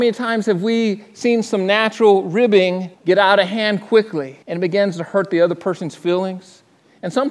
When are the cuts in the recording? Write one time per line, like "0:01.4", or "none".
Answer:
0:02.9
0:04.4